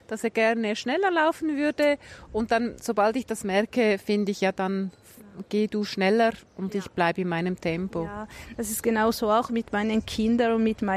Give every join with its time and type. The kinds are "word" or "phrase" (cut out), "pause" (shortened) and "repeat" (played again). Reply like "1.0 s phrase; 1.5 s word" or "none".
none

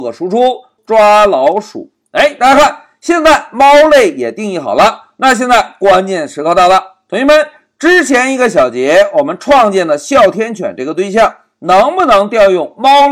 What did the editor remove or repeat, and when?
none

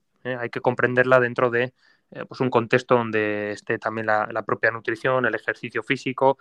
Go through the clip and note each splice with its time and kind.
none

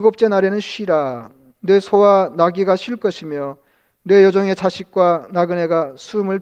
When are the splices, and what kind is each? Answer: none

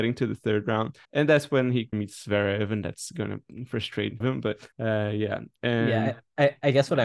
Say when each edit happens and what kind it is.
1.0 s pause; 1.9 s word; 4.2 s phrase; 4.7 s pause

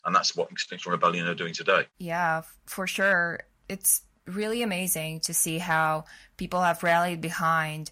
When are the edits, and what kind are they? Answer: 1.9 s pause

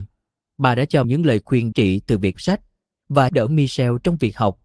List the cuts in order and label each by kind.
1.0 s word; 1.7 s word; 2.3 s word; 3.3 s word

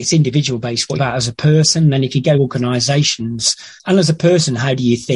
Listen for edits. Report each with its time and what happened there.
1.0 s word; 2.3 s word; 3.8 s word

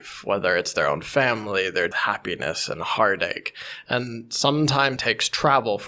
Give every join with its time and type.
1.9 s phrase; 5.0 s word

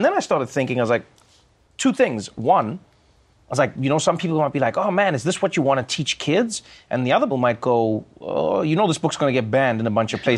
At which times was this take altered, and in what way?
7.3 s word

